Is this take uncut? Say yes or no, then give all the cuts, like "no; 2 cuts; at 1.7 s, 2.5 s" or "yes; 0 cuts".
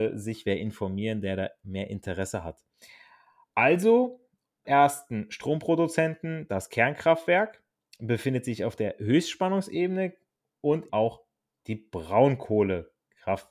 no; 2 cuts; at 4.6 s, 10.9 s